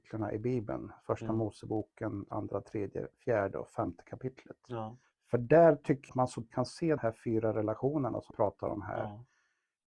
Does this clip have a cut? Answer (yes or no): yes